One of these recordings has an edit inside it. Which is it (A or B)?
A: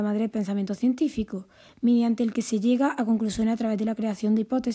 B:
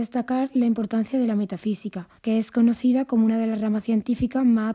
B